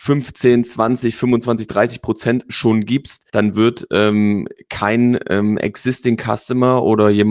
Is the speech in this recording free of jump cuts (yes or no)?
no